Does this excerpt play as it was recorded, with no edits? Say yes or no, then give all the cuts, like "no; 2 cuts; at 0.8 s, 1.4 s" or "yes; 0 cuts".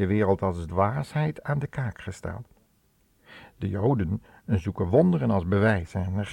yes; 0 cuts